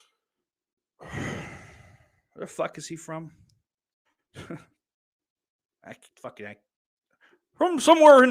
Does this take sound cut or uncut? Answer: uncut